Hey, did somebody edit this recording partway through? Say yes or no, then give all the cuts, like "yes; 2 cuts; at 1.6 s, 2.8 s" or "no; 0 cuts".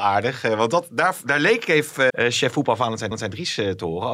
yes; 2 cuts; at 2.1 s, 3.1 s